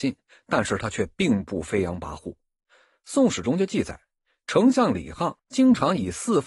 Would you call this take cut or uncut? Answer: cut